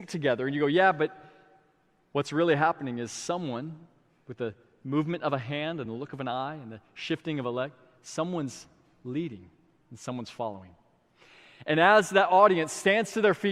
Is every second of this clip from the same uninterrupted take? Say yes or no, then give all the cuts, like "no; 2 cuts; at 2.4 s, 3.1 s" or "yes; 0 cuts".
yes; 0 cuts